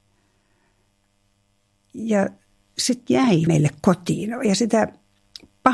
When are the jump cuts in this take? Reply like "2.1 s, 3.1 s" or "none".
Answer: 3.1 s, 3.5 s